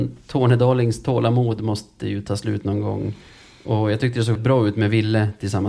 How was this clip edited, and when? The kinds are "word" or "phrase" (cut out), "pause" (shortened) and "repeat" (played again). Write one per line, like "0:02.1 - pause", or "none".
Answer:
0:04.4 - word